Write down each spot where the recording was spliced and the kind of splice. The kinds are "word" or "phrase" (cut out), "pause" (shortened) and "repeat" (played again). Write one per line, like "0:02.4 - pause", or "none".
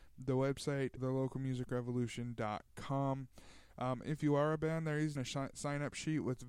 0:01.0 - word
0:05.2 - word